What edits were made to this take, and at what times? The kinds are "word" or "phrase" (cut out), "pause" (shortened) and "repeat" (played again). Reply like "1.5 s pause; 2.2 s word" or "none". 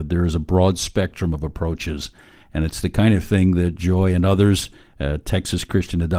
none